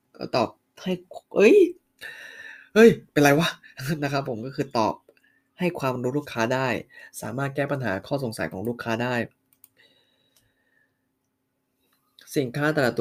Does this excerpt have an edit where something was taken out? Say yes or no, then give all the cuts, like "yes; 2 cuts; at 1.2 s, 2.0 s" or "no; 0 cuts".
no; 0 cuts